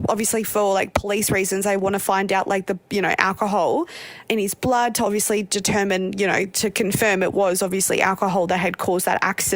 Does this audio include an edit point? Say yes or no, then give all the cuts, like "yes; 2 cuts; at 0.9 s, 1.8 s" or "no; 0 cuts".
yes; 1 cut; at 4.3 s